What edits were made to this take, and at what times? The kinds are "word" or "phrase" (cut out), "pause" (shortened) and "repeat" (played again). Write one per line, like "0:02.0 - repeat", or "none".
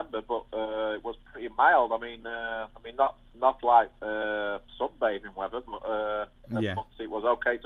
0:04.7 - pause